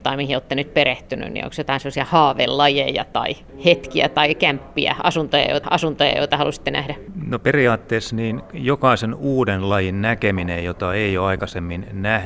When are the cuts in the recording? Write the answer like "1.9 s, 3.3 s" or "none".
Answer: 5.6 s